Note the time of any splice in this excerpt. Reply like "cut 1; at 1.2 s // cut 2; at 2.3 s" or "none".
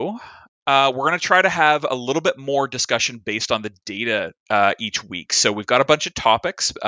cut 1; at 4.4 s

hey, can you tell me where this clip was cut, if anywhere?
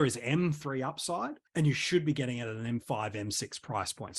cut 1; at 1.5 s

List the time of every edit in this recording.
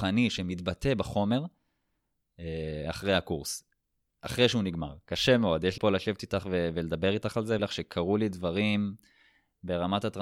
cut 1; at 5.8 s // cut 2; at 7.6 s

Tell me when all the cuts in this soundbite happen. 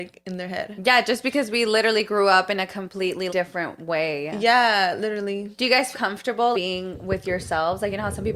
cut 1; at 3.3 s // cut 2; at 5.9 s // cut 3; at 6.5 s

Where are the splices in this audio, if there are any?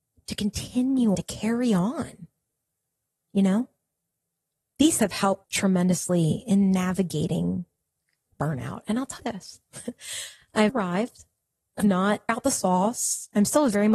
cut 1; at 1.1 s // cut 2; at 5.0 s // cut 3; at 5.4 s // cut 4; at 9.2 s // cut 5; at 10.7 s // cut 6; at 11.8 s // cut 7; at 12.3 s

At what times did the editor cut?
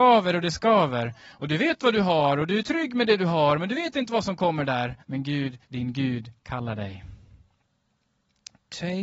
cut 1; at 5.0 s // cut 2; at 5.6 s

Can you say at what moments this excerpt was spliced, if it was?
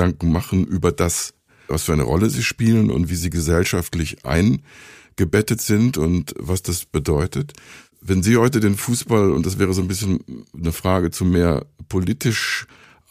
none

